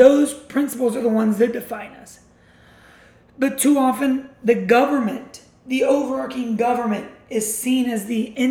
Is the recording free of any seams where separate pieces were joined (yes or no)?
yes